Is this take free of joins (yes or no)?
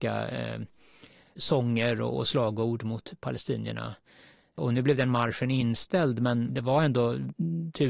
yes